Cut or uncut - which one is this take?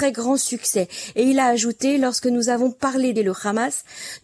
cut